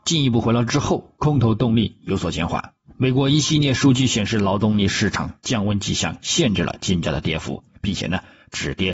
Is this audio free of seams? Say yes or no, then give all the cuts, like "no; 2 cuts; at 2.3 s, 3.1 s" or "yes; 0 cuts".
yes; 0 cuts